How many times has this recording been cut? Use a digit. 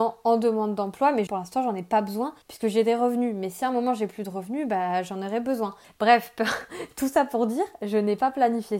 3